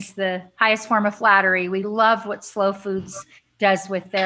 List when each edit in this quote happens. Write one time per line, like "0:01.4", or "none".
none